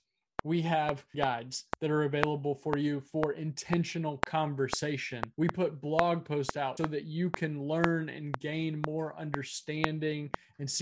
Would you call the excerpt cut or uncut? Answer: cut